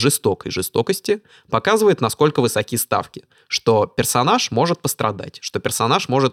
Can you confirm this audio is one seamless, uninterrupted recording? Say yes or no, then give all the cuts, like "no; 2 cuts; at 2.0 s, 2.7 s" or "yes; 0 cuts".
yes; 0 cuts